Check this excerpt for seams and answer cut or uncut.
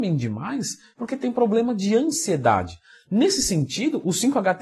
uncut